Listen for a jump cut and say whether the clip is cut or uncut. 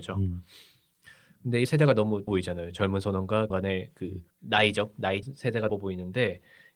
cut